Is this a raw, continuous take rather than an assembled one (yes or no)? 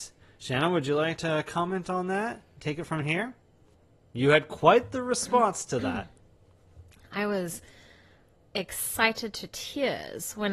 yes